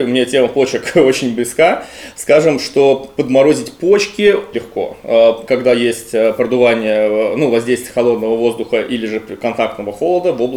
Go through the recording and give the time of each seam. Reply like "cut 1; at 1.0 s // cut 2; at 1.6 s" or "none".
cut 1; at 4.5 s